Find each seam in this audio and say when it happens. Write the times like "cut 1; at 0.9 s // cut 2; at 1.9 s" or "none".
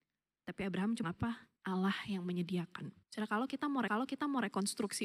cut 1; at 1.0 s // cut 2; at 1.6 s // cut 3; at 3.0 s // cut 4; at 3.9 s